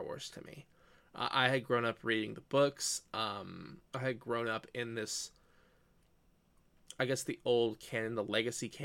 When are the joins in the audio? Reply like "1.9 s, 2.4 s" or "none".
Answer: 3.9 s